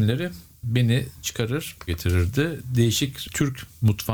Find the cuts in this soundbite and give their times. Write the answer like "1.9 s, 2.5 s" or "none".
1.2 s, 1.9 s